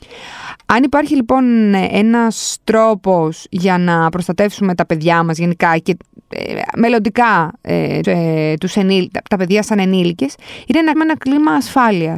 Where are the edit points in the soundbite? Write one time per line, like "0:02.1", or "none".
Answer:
0:08.0
0:10.9